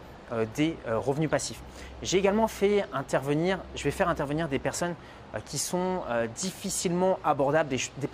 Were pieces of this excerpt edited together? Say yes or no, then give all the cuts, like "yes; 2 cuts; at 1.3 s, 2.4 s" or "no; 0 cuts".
no; 0 cuts